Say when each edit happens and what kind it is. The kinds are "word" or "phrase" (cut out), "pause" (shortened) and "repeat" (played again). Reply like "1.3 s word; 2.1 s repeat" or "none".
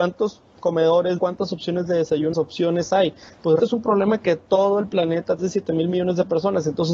1.2 s phrase; 2.3 s phrase; 3.6 s word; 5.4 s phrase